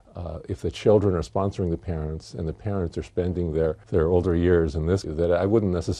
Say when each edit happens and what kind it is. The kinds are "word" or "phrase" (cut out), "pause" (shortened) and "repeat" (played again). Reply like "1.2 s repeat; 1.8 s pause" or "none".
3.8 s pause; 5.0 s word